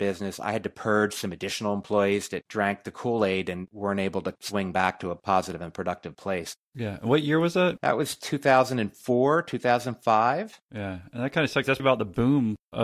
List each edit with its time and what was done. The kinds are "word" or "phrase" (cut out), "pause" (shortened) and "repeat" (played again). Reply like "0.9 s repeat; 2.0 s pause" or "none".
2.4 s word; 11.8 s word